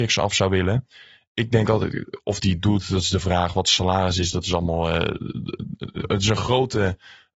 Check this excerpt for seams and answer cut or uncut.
uncut